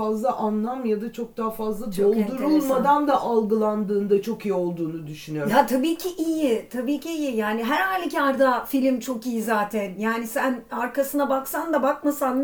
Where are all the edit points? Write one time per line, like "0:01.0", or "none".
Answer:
none